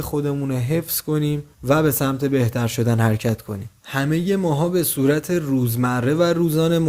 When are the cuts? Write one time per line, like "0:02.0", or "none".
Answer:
0:01.5
0:03.8